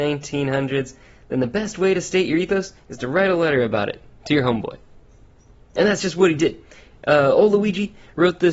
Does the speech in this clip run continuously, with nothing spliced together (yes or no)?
yes